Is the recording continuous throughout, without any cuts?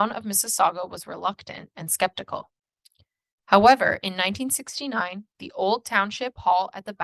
yes; 0 cuts

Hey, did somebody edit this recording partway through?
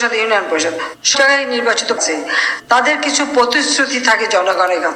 yes; 2 cuts; at 1.1 s, 2.0 s

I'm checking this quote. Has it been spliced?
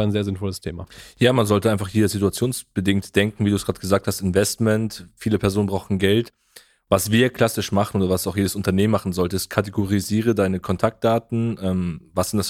no; 0 cuts

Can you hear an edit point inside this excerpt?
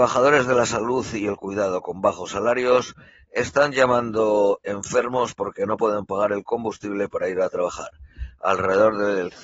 no; 0 cuts

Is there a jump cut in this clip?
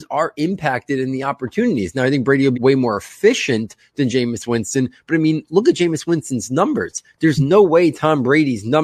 yes; 1 cut; at 2.5 s

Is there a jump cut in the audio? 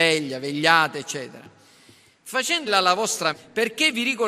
yes; 2 cuts; at 2.7 s, 3.3 s

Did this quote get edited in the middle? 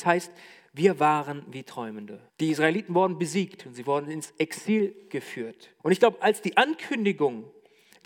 yes; 2 cuts; at 2.3 s, 5.8 s

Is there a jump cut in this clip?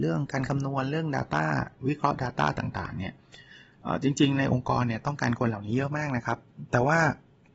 no; 0 cuts

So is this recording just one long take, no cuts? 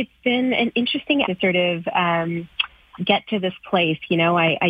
no; 2 cuts; at 1.2 s, 3.0 s

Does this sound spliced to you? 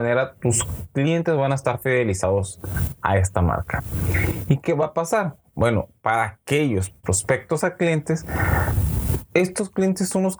yes; 1 cut; at 7.0 s

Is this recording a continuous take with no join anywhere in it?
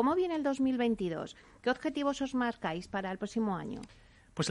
yes; 0 cuts

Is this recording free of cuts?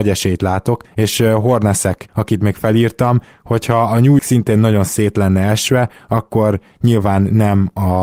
no; 1 cut; at 4.2 s

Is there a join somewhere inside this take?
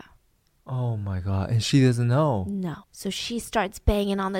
yes; 1 cut; at 2.8 s

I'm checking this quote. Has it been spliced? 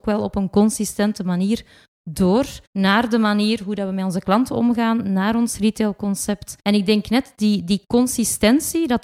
yes; 2 cuts; at 2.7 s, 6.6 s

